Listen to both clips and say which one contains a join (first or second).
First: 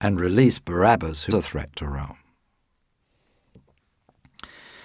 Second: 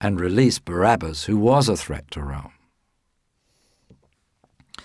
first